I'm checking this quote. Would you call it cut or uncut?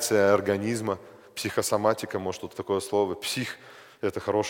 cut